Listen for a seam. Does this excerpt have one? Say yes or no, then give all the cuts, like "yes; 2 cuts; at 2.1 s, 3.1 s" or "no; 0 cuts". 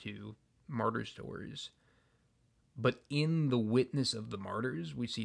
no; 0 cuts